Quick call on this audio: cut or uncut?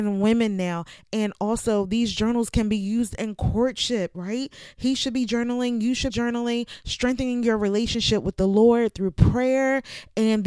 cut